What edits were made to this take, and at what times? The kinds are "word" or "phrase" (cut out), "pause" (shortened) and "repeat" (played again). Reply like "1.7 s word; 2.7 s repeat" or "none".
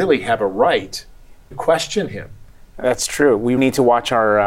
1.5 s word; 3.6 s word